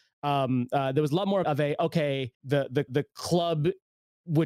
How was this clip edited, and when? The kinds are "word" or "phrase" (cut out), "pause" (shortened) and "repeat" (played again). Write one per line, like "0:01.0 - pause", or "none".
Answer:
0:01.4 - word
0:02.3 - pause
0:02.9 - repeat